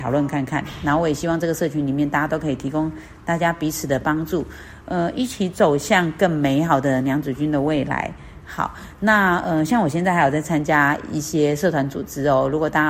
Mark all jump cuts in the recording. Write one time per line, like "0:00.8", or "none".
none